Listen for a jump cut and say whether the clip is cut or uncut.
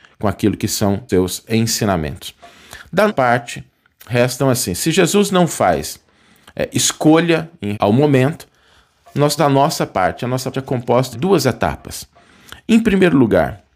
cut